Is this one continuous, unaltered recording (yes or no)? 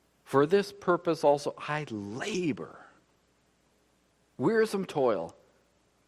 yes